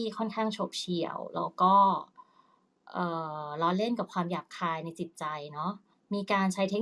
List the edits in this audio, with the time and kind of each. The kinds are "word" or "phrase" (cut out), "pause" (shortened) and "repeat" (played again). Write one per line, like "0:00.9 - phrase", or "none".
0:05.9 - pause